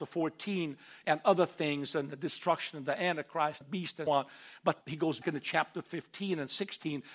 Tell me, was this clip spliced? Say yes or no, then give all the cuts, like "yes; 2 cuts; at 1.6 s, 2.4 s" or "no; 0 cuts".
yes; 4 cuts; at 3.6 s, 4.1 s, 4.8 s, 5.2 s